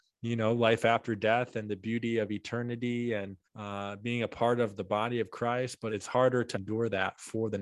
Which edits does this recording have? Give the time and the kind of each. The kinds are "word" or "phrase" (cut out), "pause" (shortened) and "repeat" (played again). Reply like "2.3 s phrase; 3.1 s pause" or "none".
3.4 s pause; 5.9 s word; 6.5 s word